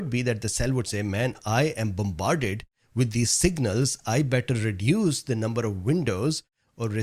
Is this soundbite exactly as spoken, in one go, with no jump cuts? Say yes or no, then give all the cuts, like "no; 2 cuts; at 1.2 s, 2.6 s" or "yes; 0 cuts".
yes; 0 cuts